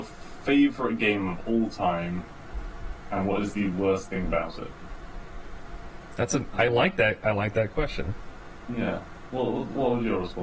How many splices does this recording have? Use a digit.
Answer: 0